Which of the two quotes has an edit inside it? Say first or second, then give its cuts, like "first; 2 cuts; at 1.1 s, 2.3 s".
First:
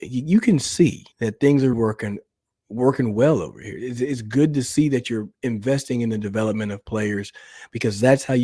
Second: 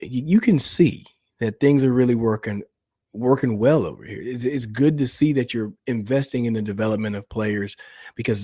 first; 2 cuts; at 1.1 s, 1.7 s